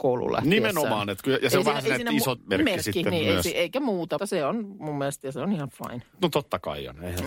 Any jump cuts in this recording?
yes; 2 cuts; at 2.4 s, 4.2 s

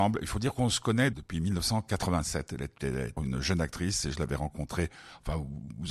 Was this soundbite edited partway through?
yes; 2 cuts; at 1.1 s, 3.2 s

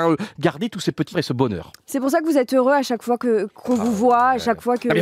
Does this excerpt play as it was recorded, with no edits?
no; 1 cut; at 1.1 s

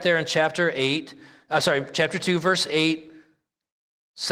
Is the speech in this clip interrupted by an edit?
no; 0 cuts

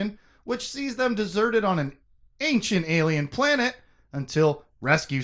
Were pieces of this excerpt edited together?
no; 0 cuts

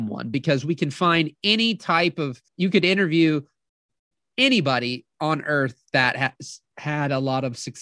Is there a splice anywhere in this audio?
yes; 1 cut; at 2.5 s

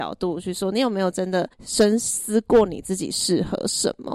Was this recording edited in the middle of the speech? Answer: yes; 1 cut; at 1.5 s

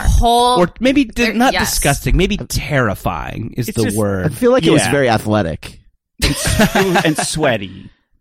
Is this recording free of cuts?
yes; 0 cuts

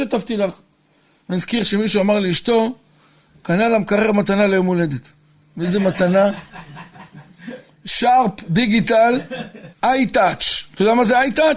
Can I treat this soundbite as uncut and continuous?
no; 1 cut; at 9.7 s

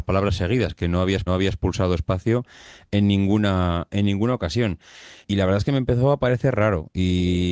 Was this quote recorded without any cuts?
no; 2 cuts; at 1.3 s, 5.2 s

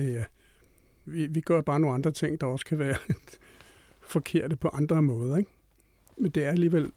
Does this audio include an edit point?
no; 0 cuts

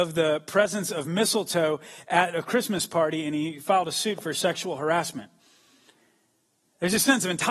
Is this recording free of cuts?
yes; 0 cuts

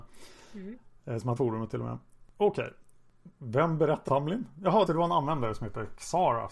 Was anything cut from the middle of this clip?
yes; 3 cuts; at 1.4 s, 4.1 s, 4.9 s

